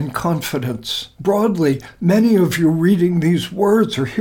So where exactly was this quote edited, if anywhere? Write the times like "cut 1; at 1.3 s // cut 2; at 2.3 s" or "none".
cut 1; at 1.1 s